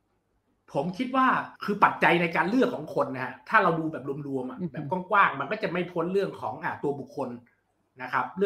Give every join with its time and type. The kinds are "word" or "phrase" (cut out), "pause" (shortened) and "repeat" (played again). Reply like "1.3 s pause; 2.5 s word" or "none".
1.6 s pause